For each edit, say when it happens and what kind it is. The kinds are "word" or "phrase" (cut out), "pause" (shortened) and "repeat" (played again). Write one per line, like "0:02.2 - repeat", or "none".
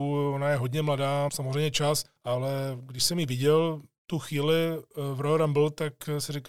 0:01.3 - word
0:02.2 - pause